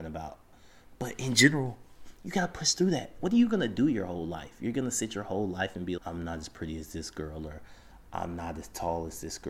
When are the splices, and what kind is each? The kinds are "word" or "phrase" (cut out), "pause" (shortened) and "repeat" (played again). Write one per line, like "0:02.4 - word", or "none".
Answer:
0:06.0 - word